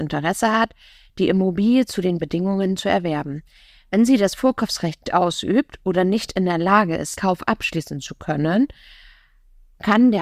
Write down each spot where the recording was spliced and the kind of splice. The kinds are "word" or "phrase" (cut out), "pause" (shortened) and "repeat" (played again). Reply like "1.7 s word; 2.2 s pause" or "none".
2.2 s word; 5.1 s word; 7.2 s word